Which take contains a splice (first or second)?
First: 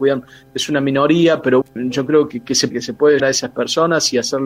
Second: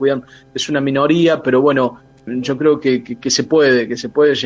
first